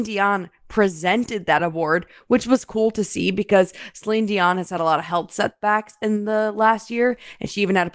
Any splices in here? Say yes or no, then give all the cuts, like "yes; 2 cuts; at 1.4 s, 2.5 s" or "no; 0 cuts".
no; 0 cuts